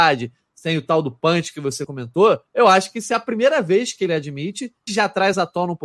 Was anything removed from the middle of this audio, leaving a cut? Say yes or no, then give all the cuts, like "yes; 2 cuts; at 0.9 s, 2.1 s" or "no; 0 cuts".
yes; 2 cuts; at 2.5 s, 4.9 s